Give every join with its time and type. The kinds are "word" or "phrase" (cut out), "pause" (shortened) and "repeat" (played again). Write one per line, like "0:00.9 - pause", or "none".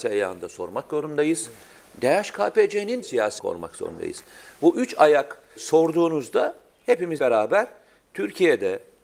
0:03.0 - word
0:03.4 - word
0:05.6 - word
0:07.2 - word